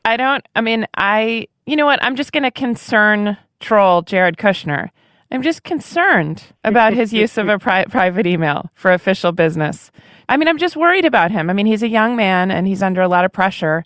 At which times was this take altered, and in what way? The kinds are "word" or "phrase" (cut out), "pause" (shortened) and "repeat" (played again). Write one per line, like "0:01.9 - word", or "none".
none